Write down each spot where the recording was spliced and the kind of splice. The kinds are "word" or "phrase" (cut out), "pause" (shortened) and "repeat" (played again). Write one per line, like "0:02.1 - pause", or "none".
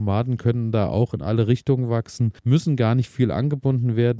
0:02.4 - pause